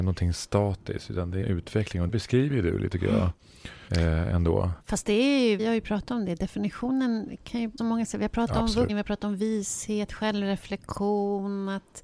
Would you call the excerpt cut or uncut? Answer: cut